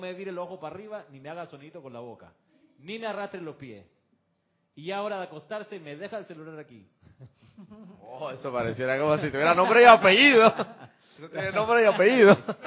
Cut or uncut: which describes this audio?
uncut